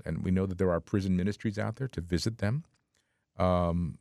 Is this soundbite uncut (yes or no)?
yes